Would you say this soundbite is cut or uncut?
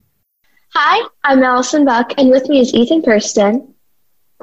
uncut